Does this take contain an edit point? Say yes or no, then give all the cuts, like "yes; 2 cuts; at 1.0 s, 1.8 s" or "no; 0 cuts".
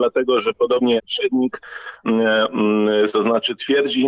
yes; 2 cuts; at 1.0 s, 3.1 s